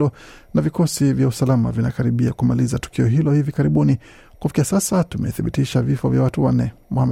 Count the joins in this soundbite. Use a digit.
0